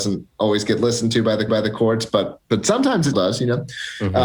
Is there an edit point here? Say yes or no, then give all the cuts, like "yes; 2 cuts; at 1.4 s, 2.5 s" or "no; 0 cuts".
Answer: yes; 2 cuts; at 1.5 s, 3.1 s